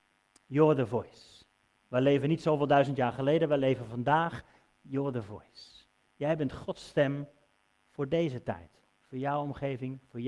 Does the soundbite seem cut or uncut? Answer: uncut